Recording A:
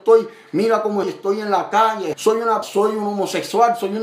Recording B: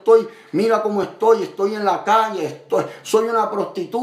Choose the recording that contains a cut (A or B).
A